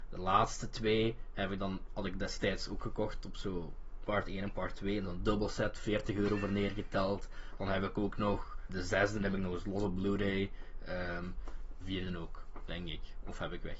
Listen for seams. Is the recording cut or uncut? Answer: cut